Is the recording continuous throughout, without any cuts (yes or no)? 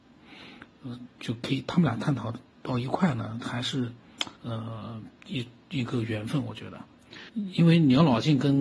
no